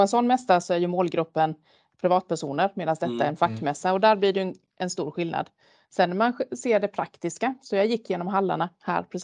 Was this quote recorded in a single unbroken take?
yes; 0 cuts

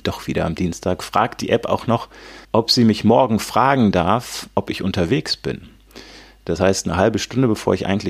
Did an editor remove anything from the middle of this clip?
yes; 1 cut; at 2.4 s

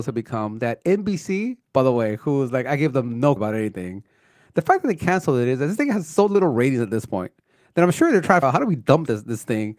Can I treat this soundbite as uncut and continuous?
no; 3 cuts; at 1.7 s, 3.4 s, 8.4 s

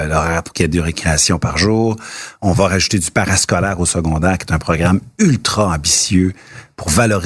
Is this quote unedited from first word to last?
yes; 0 cuts

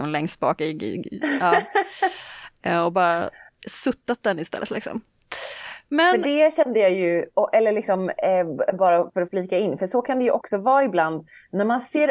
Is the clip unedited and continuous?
yes; 0 cuts

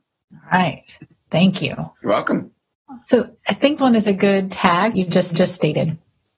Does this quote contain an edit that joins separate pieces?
yes; 5 cuts; at 2.0 s, 3.4 s, 3.8 s, 4.9 s, 5.3 s

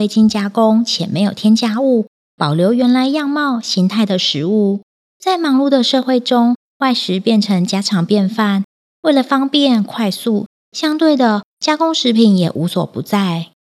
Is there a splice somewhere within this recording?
no; 0 cuts

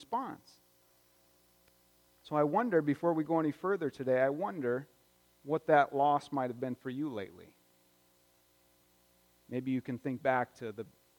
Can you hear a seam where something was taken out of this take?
yes; 1 cut; at 5.1 s

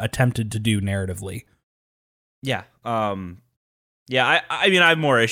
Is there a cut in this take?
no; 0 cuts

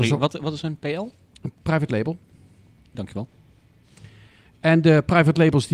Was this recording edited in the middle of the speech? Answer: yes; 1 cut; at 2.9 s

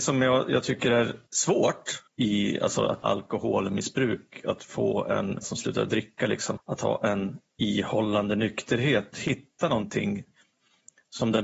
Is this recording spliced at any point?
yes; 7 cuts; at 1.3 s, 2.1 s, 3.0 s, 5.4 s, 6.6 s, 7.5 s, 9.1 s

